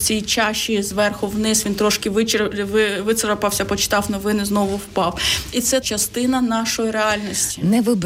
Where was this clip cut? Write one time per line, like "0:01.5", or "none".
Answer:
0:05.8